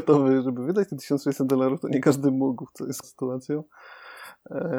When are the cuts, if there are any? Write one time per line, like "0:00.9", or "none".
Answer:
0:03.0